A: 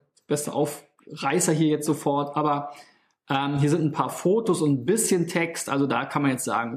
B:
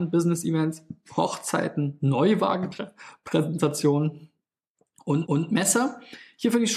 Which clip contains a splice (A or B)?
B